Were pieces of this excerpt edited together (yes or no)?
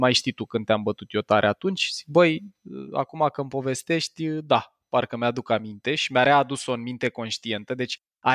no